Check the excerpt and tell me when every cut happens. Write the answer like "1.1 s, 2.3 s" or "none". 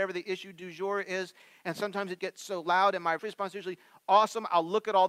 2.2 s, 3.2 s